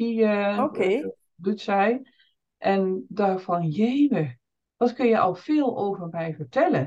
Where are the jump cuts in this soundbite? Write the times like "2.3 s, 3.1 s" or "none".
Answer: none